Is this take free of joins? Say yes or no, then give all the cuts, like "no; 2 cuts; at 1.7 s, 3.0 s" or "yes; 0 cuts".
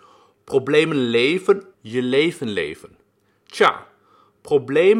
no; 1 cut; at 1.7 s